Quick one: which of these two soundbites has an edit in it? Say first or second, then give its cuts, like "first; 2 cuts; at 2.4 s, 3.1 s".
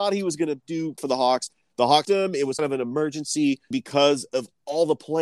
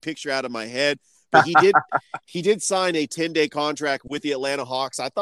first; 4 cuts; at 1.0 s, 2.0 s, 2.6 s, 3.7 s